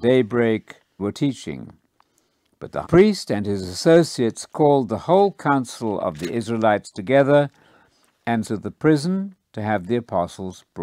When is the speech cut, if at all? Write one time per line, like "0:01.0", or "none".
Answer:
0:01.0
0:02.8
0:08.4